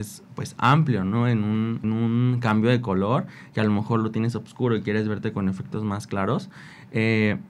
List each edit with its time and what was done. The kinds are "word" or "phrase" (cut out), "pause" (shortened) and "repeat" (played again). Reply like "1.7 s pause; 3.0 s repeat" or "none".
1.8 s word